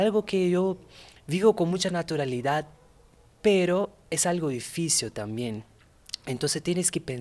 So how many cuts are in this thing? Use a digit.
0